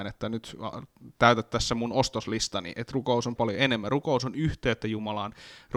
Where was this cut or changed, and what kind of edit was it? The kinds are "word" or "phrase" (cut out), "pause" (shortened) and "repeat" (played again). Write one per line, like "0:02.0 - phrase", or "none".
0:03.4 - word